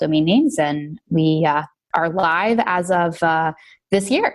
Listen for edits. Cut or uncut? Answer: uncut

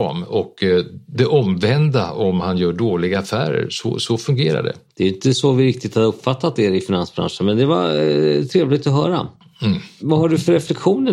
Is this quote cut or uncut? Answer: uncut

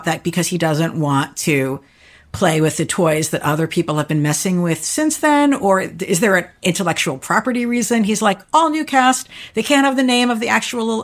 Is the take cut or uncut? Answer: uncut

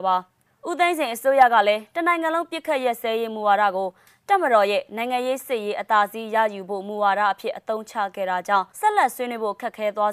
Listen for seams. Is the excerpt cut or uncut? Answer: cut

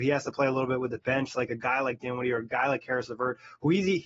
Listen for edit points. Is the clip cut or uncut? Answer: uncut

